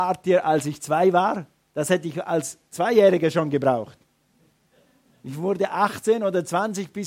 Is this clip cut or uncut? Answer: uncut